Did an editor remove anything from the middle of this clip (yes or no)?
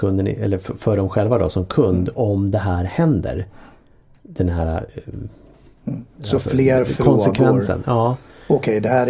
no